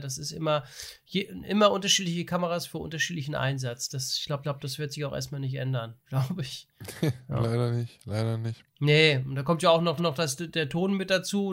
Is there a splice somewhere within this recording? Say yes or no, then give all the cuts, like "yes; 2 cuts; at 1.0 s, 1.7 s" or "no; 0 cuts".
yes; 3 cuts; at 4.4 s, 6.0 s, 10.0 s